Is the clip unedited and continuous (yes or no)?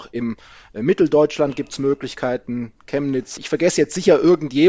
no